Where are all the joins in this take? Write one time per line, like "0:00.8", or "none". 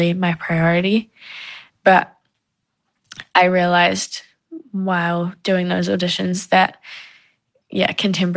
none